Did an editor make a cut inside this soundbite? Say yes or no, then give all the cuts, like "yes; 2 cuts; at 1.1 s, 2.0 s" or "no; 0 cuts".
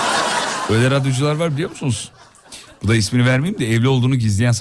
no; 0 cuts